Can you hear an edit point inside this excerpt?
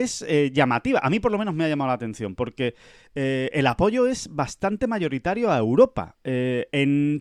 no; 0 cuts

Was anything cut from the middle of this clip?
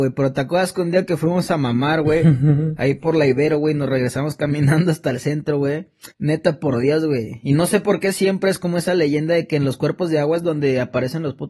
yes; 1 cut; at 6.1 s

